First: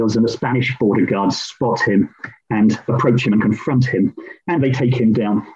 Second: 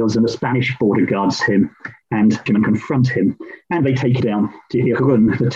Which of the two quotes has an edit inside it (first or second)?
second